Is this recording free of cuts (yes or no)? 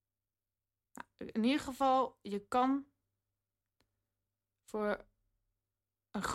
yes